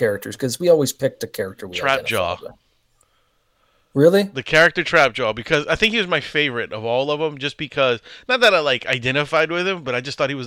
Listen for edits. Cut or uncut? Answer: uncut